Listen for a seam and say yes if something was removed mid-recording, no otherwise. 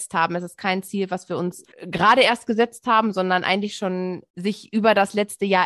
yes